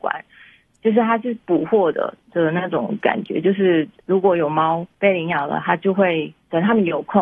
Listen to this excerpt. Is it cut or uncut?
uncut